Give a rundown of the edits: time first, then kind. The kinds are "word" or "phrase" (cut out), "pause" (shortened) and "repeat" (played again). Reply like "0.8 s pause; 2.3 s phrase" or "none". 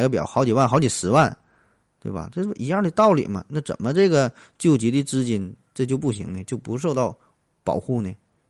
none